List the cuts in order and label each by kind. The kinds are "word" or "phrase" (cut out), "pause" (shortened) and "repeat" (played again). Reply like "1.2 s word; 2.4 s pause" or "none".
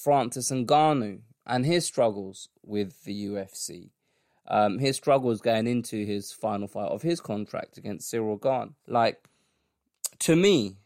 8.8 s pause

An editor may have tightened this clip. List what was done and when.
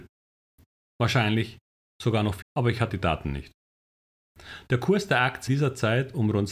2.4 s word; 2.9 s word; 5.5 s phrase

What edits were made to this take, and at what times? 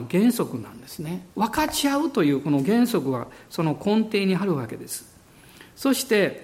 1.3 s pause

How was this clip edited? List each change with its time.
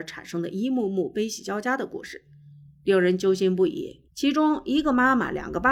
4.1 s pause

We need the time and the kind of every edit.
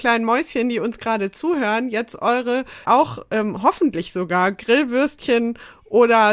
2.8 s word

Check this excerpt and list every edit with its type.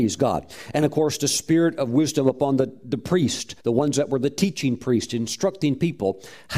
3.6 s pause

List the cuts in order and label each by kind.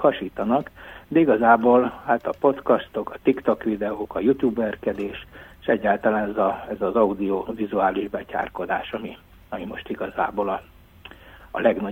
none

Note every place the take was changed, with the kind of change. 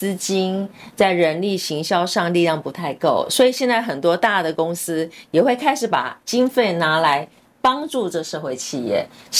6.2 s pause

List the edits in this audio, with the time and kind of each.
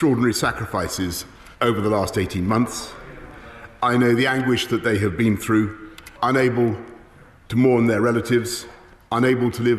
1.5 s pause; 6.1 s pause

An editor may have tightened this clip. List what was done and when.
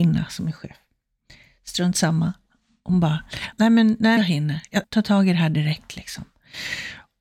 3.5 s word; 4.2 s word; 4.8 s word

